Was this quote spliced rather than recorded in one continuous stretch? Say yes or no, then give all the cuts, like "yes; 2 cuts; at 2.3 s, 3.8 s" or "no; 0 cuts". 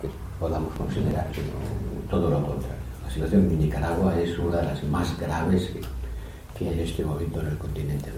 yes; 2 cuts; at 1.3 s, 6.7 s